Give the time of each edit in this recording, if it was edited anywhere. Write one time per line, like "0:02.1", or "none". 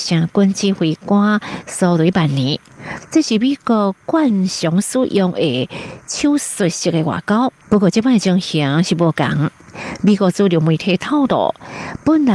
0:07.6